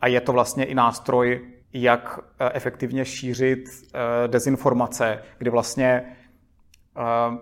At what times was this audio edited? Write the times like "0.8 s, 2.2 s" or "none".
1.6 s